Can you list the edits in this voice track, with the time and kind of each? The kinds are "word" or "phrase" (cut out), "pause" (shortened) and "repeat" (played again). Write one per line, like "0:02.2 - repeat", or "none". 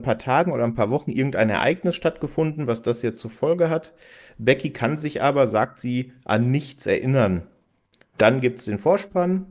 none